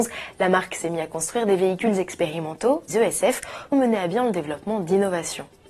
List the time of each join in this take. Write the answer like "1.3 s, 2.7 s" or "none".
2.9 s, 3.7 s